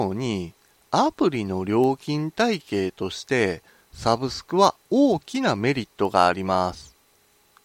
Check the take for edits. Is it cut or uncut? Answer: uncut